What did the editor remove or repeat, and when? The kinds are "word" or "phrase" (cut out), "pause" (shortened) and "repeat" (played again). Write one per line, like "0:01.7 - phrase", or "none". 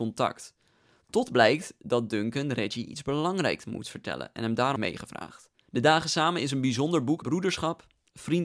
0:04.8 - word
0:05.7 - pause
0:07.2 - word